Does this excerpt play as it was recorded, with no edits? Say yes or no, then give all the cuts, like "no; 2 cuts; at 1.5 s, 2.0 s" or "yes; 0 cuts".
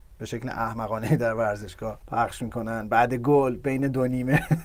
yes; 0 cuts